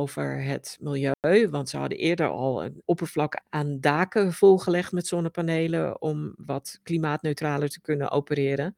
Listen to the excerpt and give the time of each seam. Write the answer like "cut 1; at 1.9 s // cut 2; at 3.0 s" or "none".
cut 1; at 2.8 s